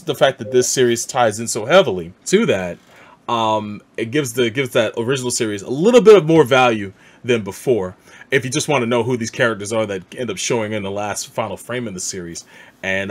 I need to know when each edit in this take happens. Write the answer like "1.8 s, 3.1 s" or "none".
2.2 s